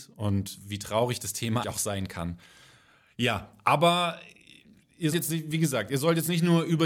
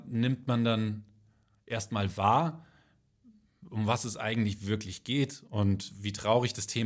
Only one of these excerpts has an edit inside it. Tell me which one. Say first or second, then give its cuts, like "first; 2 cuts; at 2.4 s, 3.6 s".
first; 2 cuts; at 1.6 s, 5.1 s